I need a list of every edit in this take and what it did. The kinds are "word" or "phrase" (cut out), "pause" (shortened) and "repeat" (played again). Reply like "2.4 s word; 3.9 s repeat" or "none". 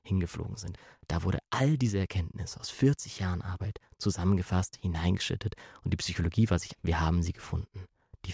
6.7 s word